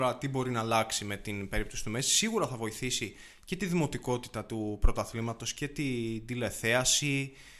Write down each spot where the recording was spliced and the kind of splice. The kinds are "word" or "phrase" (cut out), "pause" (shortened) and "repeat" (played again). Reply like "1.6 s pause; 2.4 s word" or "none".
none